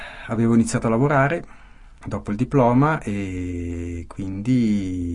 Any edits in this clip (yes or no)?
no